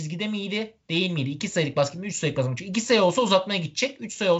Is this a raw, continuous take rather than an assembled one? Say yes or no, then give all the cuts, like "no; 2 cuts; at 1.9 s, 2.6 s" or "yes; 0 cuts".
yes; 0 cuts